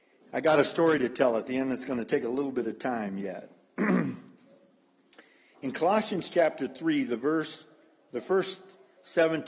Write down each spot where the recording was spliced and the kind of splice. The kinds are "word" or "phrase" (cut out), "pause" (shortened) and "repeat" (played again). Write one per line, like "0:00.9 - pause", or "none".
none